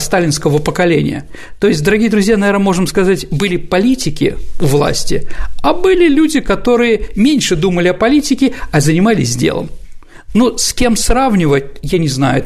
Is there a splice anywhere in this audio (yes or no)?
no